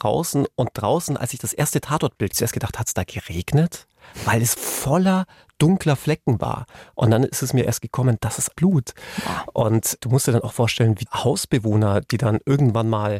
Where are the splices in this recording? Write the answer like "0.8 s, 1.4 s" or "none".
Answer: 2.3 s, 4.6 s, 8.5 s, 11.1 s